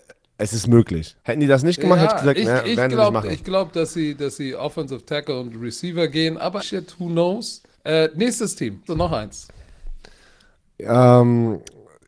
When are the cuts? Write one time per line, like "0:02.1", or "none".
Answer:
0:01.2
0:06.6
0:07.7
0:08.9